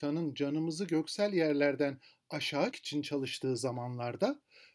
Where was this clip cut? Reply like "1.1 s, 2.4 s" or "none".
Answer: 2.7 s